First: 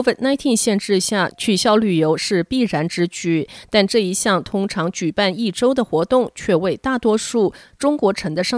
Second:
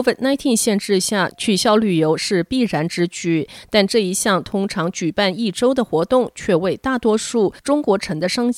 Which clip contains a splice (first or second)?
second